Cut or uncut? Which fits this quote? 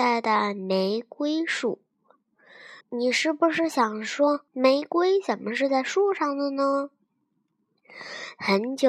cut